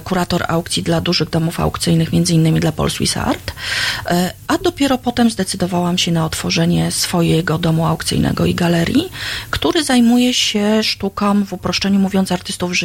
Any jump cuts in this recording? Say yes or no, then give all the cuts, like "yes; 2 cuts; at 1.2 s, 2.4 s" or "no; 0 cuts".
no; 0 cuts